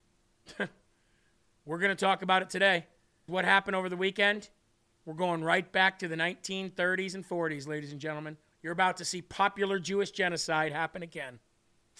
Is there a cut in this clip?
yes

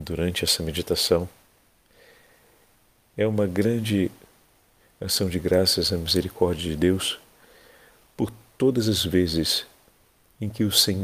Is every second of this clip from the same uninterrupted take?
yes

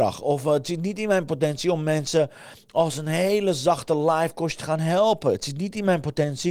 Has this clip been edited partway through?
no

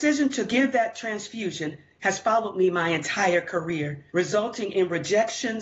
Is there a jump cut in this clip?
yes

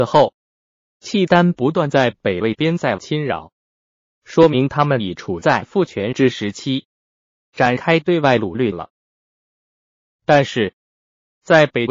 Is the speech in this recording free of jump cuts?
yes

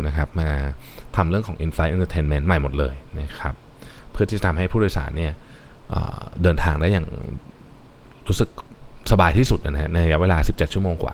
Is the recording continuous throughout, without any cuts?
yes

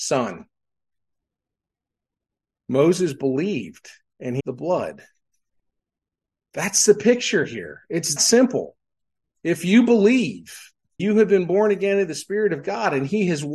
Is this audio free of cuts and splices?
no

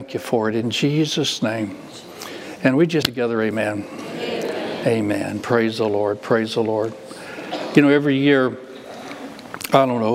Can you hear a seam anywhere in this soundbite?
yes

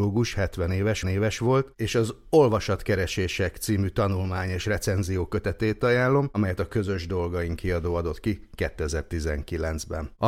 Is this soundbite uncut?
no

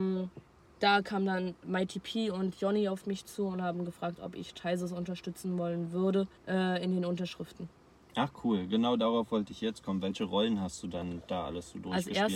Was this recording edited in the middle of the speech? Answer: yes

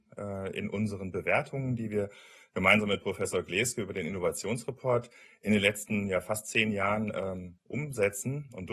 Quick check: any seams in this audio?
no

